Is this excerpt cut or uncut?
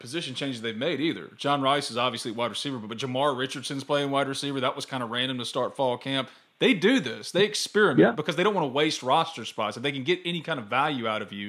uncut